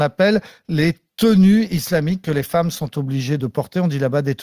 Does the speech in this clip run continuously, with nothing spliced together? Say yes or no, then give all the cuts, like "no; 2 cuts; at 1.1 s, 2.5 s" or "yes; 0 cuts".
yes; 0 cuts